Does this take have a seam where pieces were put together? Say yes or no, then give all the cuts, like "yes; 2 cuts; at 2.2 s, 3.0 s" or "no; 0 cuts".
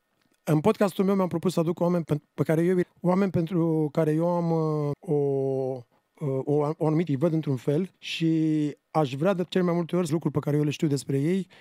yes; 7 cuts; at 2.0 s, 2.8 s, 4.9 s, 6.0 s, 7.1 s, 7.9 s, 10.1 s